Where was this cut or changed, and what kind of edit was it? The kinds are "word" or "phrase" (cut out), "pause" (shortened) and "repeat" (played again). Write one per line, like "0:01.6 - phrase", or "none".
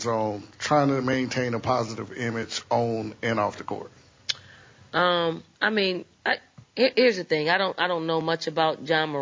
0:05.5 - pause
0:06.1 - pause